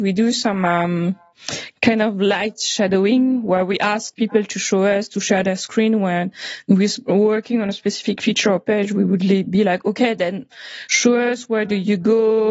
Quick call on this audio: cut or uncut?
uncut